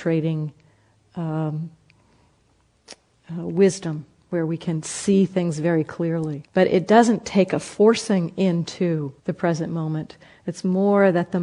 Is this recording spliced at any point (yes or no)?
yes